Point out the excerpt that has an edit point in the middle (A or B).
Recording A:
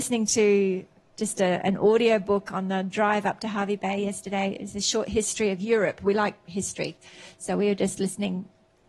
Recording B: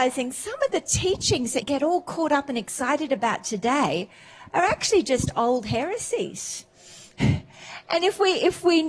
B